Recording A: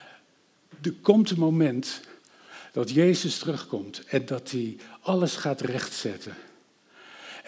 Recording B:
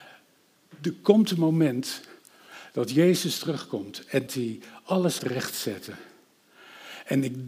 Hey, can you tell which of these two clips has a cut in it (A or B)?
B